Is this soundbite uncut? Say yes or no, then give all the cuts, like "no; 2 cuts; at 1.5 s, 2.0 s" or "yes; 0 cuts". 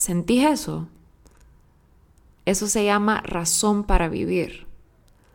yes; 0 cuts